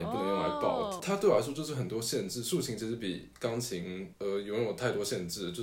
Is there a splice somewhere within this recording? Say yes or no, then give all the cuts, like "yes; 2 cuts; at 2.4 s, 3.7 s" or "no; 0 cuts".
no; 0 cuts